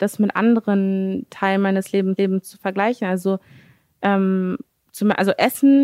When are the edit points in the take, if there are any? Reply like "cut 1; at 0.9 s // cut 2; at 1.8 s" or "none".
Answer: cut 1; at 2.2 s